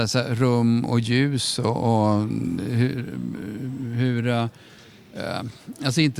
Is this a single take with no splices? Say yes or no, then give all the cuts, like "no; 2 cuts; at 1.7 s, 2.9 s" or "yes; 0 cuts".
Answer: yes; 0 cuts